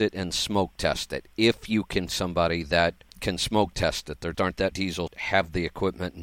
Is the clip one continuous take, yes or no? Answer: no